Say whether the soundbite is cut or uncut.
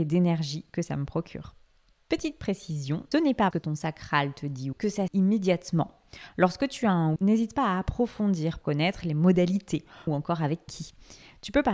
cut